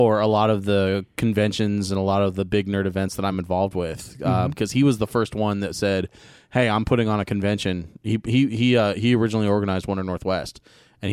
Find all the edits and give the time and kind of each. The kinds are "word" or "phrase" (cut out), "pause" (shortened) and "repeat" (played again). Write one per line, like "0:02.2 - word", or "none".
none